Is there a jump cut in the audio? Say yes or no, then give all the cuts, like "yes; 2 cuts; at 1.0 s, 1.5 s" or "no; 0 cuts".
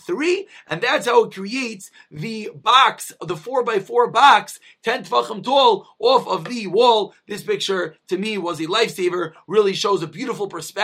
no; 0 cuts